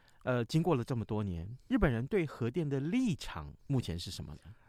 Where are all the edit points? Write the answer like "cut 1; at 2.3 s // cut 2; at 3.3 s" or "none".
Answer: cut 1; at 3.6 s